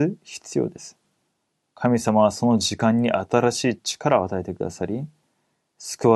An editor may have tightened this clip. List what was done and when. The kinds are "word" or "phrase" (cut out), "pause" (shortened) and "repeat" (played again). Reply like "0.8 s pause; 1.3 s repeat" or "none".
none